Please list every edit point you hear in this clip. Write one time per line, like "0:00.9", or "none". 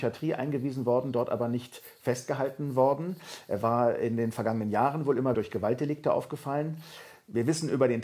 0:05.3

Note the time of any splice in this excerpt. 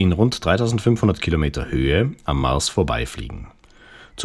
none

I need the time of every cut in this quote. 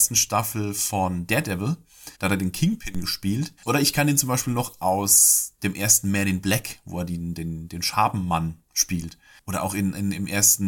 0:02.1
0:03.6

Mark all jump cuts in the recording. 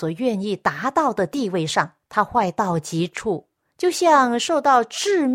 0:02.0

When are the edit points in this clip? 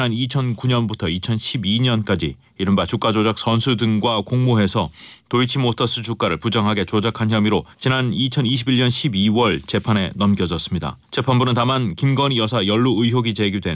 0:07.7
0:11.0

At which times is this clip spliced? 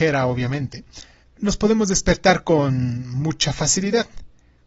0:01.2

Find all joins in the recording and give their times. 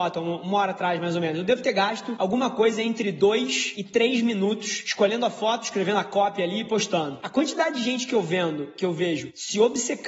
none

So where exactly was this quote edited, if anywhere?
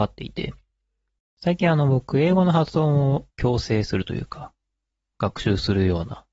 0:03.3

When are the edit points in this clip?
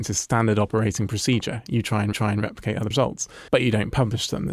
0:02.1
0:02.9
0:03.5

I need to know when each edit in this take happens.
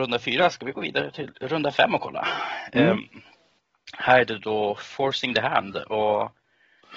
none

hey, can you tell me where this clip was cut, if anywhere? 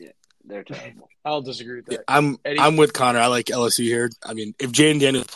none

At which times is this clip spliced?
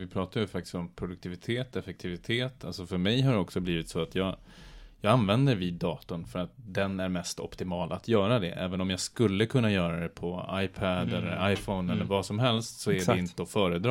none

